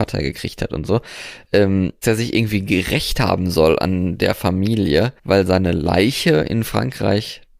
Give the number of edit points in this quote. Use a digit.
2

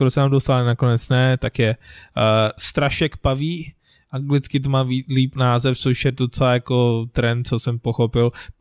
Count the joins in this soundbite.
0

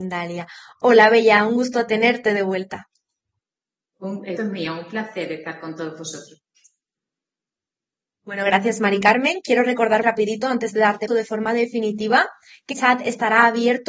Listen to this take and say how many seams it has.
4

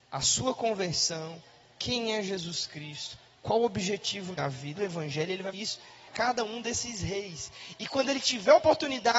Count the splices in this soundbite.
4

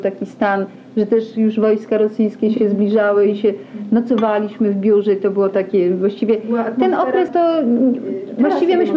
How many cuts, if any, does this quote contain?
1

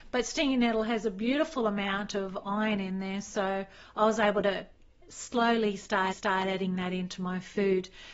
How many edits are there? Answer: 1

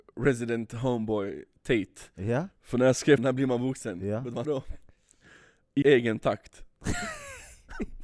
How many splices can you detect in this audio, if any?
4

